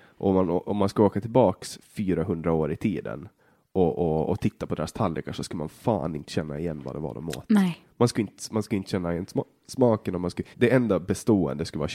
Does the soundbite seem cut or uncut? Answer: cut